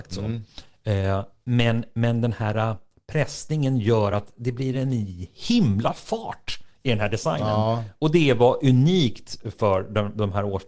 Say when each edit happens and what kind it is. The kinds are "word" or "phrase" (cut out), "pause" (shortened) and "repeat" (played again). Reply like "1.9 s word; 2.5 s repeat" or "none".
none